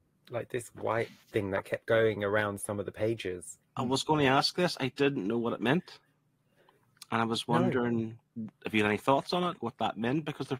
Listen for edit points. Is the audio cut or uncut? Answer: cut